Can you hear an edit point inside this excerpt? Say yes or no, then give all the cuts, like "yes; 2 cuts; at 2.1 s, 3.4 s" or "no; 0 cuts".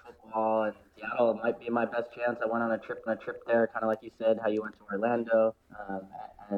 yes; 3 cuts; at 0.9 s, 3.1 s, 5.6 s